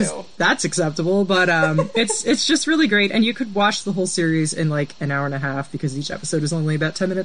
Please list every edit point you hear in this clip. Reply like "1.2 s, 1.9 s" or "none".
none